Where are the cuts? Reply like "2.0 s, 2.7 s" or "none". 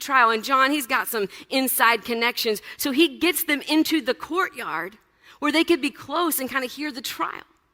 none